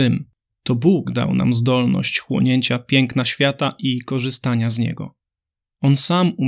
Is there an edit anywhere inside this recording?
no; 0 cuts

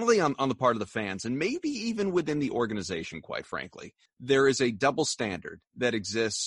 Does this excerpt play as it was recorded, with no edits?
no; 1 cut; at 4.1 s

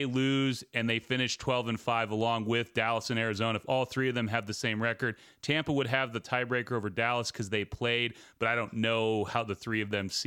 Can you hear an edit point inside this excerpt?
no; 0 cuts

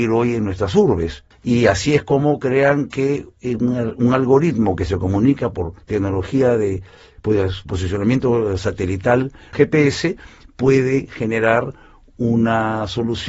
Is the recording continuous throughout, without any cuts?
yes; 0 cuts

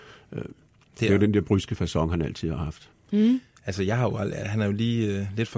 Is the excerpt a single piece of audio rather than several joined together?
yes; 0 cuts

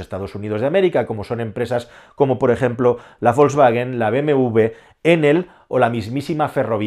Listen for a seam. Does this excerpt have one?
no; 0 cuts

